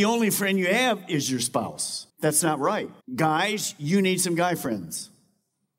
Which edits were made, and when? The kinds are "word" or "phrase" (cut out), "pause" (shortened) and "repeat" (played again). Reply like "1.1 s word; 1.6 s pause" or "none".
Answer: 2.1 s pause; 3.0 s pause